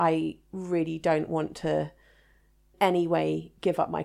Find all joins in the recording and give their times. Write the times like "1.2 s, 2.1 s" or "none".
2.7 s